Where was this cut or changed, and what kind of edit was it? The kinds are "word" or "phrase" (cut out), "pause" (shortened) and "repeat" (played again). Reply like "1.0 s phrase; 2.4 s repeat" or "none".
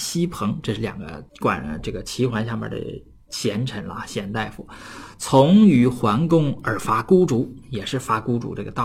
1.3 s pause